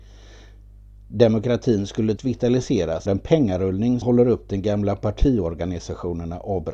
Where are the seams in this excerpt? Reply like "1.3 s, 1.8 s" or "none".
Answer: 2.2 s, 3.1 s, 4.0 s